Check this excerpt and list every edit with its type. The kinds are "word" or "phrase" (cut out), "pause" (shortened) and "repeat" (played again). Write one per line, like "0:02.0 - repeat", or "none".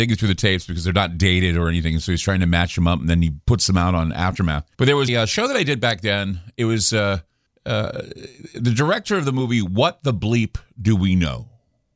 0:04.7 - pause
0:05.1 - word
0:07.5 - pause